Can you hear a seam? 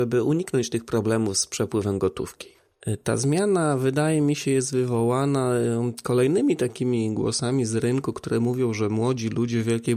no; 0 cuts

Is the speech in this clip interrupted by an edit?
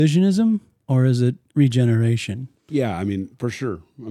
yes; 1 cut; at 2.6 s

